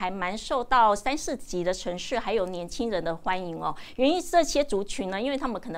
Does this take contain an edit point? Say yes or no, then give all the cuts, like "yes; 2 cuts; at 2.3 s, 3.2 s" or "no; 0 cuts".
no; 0 cuts